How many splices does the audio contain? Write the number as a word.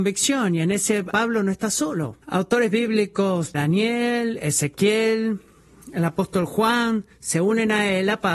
three